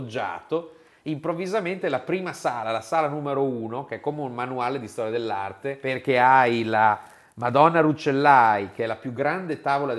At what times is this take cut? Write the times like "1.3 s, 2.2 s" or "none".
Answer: 1.8 s